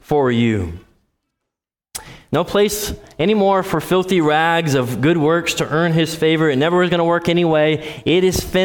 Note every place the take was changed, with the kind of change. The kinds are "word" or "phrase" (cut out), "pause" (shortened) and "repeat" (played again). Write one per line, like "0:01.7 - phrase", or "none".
none